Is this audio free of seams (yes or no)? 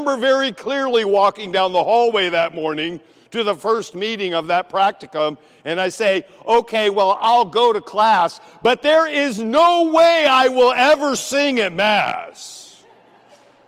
yes